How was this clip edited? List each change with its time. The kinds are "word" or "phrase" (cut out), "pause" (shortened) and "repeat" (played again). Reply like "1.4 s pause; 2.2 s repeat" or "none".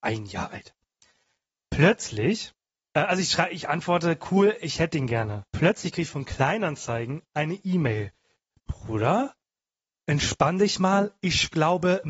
2.8 s pause; 5.5 s pause